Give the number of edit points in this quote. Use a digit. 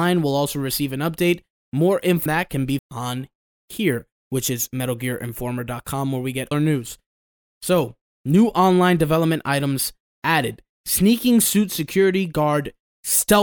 3